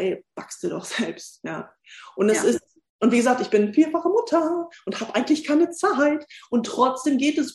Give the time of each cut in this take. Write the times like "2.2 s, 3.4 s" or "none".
none